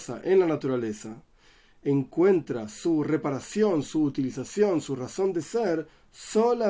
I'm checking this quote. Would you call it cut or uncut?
uncut